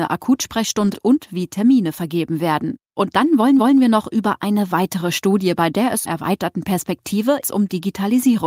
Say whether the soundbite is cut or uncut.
cut